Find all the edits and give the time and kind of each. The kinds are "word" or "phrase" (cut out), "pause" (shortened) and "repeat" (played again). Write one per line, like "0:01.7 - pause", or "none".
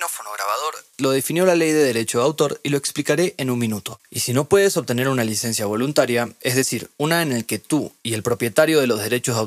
none

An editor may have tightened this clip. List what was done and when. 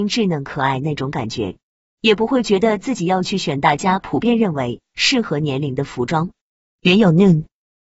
none

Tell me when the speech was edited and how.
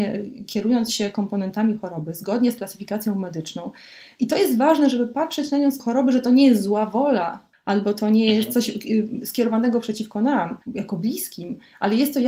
0:05.8 - word
0:07.5 - pause
0:10.6 - pause

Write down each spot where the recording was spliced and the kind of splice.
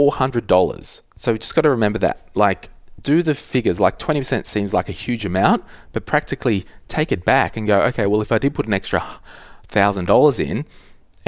0:01.1 - pause

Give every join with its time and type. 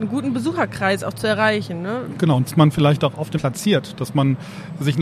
0:02.5 - word
0:03.3 - word

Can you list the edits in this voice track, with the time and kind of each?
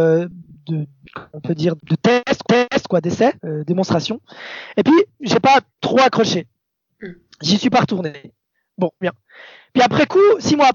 0:01.8 - word
0:02.4 - repeat
0:03.4 - pause
0:05.7 - pause
0:09.0 - word

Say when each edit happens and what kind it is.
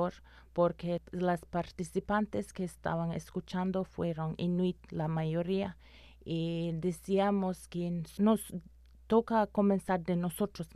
none

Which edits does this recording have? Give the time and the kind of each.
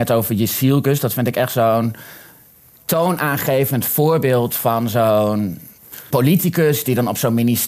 0:06.1 - word

